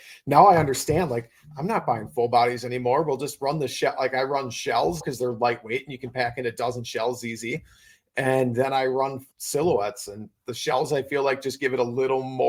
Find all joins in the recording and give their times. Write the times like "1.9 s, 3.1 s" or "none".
5.0 s, 9.3 s